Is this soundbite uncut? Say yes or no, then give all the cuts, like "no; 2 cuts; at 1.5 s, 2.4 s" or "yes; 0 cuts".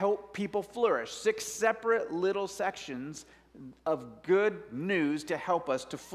yes; 0 cuts